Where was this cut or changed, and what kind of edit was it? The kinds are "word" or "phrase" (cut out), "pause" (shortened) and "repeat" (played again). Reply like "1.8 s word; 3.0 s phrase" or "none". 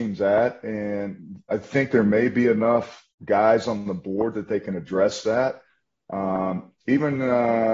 3.1 s pause; 6.8 s pause